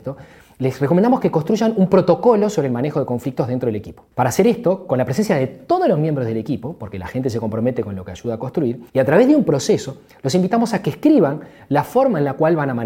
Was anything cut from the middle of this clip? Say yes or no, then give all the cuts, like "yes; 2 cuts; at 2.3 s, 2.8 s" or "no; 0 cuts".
yes; 2 cuts; at 4.1 s, 8.9 s